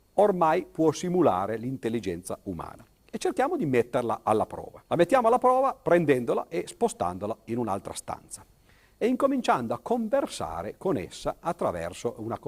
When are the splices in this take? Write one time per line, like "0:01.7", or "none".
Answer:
0:04.8